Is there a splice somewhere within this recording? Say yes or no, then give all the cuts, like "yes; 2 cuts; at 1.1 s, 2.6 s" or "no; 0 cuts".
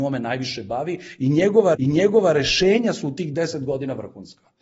yes; 1 cut; at 1.8 s